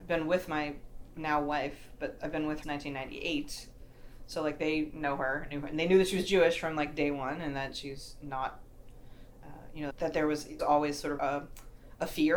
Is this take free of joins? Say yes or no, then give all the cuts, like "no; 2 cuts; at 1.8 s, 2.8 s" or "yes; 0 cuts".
no; 4 cuts; at 2.6 s, 9.9 s, 10.6 s, 11.2 s